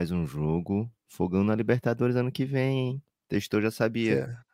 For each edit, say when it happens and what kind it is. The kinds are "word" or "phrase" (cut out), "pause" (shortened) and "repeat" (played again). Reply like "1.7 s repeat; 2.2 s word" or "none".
none